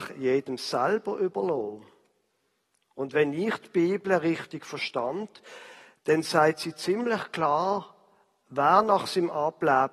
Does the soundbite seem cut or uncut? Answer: uncut